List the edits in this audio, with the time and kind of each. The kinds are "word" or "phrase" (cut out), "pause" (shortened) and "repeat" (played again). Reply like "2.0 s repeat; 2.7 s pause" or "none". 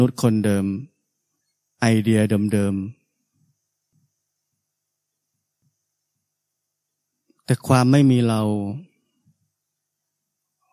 1.4 s pause